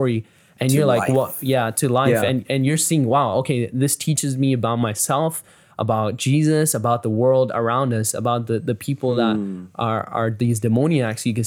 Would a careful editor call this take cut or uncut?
uncut